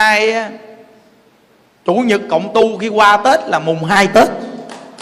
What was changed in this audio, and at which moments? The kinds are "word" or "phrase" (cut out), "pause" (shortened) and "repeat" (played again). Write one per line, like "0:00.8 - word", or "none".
none